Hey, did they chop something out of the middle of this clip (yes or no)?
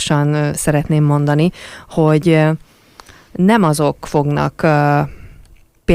no